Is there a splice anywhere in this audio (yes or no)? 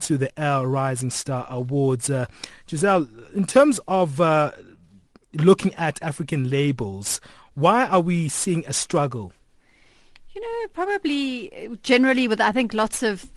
no